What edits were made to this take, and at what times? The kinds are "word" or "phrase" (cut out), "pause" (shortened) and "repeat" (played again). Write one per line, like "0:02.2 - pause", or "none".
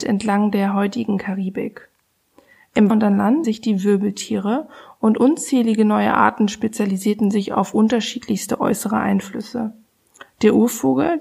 0:02.9 - word
0:03.4 - word

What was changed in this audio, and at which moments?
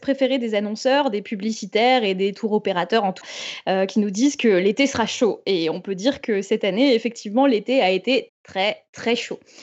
0:03.2 - word
0:08.3 - word

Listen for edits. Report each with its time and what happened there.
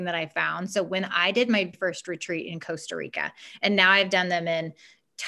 0:01.7 - word

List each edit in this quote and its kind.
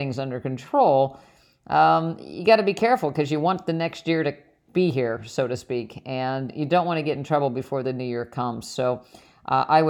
none

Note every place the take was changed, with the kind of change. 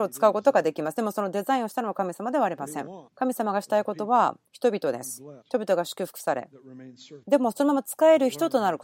0:03.1 - pause
0:04.5 - pause
0:05.4 - pause
0:07.2 - pause

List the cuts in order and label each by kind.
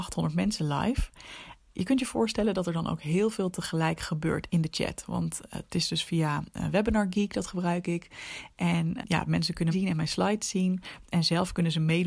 0:09.0 - word
0:09.7 - word

